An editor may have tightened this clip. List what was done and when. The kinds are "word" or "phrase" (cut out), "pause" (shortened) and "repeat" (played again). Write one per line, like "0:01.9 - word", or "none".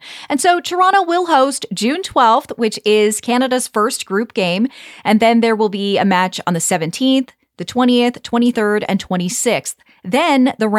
none